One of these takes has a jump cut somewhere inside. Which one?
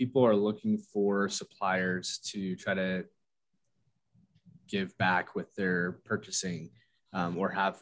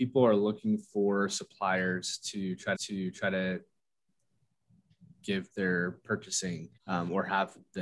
second; 3 cuts; at 2.7 s, 5.5 s, 6.8 s

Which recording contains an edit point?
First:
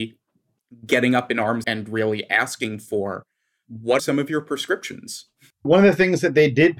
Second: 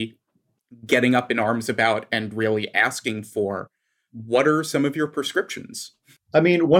first; 3 cuts; at 1.6 s, 4.0 s, 5.6 s

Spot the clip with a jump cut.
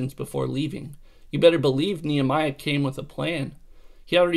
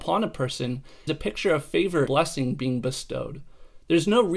second; 2 cuts; at 1.1 s, 2.1 s

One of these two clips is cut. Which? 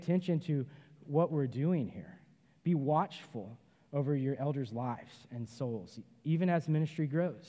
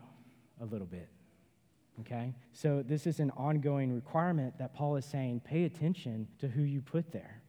second; 2 cuts; at 2.5 s, 6.3 s

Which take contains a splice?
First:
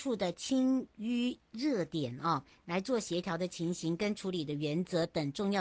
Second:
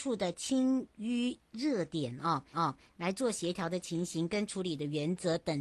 second; 1 cut; at 2.5 s

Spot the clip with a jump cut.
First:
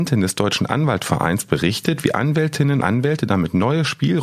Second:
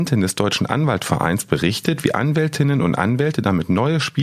first; 1 cut; at 2.8 s

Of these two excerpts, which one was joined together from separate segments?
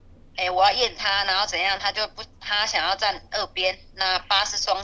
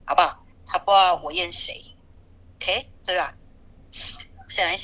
second; 1 cut; at 3.0 s

